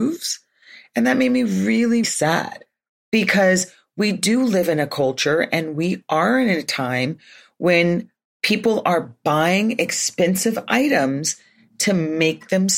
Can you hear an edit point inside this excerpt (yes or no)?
yes